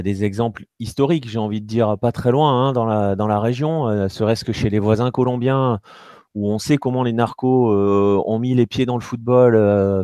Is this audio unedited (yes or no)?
yes